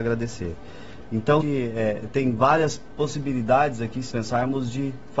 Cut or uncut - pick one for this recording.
cut